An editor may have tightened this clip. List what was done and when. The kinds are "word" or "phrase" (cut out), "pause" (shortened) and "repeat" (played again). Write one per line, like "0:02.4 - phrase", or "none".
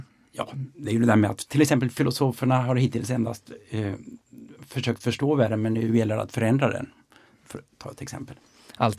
none